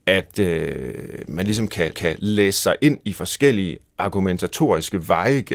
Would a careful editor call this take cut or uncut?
cut